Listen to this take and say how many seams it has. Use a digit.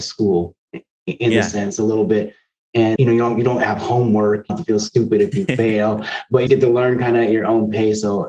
3